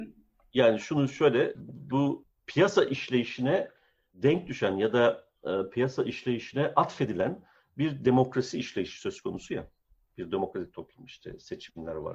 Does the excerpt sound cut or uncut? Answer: uncut